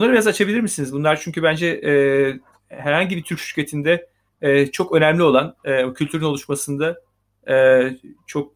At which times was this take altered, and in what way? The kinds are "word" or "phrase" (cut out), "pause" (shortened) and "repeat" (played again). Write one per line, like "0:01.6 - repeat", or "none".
none